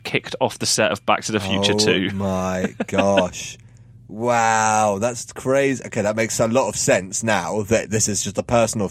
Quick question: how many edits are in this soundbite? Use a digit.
0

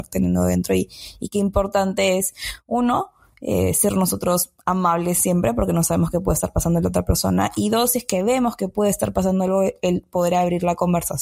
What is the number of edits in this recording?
0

